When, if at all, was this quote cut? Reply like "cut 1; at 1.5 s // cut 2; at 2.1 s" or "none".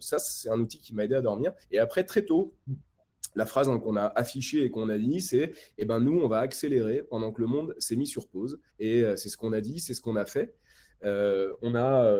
cut 1; at 1.6 s // cut 2; at 8.7 s